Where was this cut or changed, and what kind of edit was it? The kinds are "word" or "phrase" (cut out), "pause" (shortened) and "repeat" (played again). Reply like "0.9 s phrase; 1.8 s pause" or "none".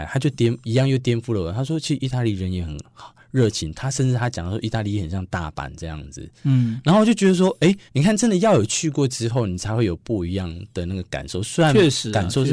7.9 s pause